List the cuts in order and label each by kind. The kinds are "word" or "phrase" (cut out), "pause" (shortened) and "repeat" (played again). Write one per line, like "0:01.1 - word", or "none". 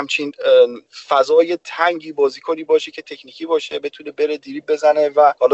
none